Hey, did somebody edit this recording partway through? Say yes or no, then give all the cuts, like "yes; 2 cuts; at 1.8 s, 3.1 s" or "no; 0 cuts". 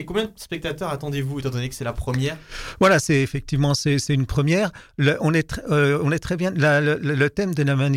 no; 0 cuts